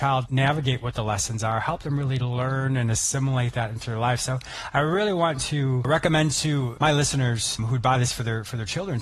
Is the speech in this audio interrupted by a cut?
no; 0 cuts

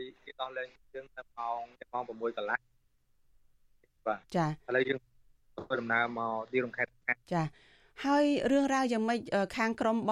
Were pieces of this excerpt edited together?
yes; 3 cuts; at 1.7 s, 4.2 s, 7.2 s

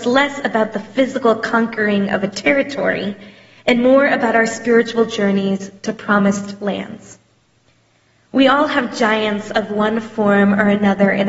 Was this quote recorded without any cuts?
yes; 0 cuts

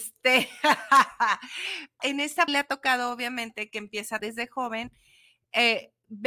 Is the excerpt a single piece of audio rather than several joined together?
no; 3 cuts; at 2.0 s, 2.5 s, 4.2 s

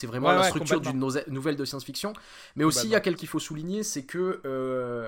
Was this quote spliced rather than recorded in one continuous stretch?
yes; 1 cut; at 3.2 s

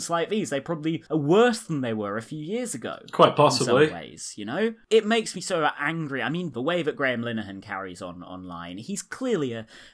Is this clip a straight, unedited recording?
no; 1 cut; at 1.1 s

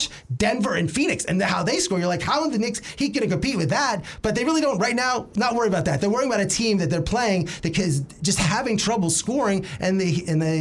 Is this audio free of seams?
yes; 0 cuts

